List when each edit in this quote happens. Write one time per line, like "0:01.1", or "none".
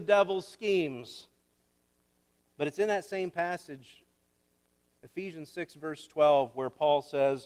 none